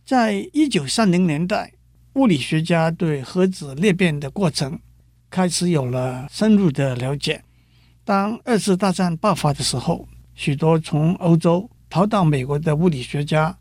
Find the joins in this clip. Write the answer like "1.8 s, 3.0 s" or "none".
none